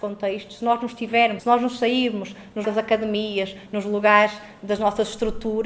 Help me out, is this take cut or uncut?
cut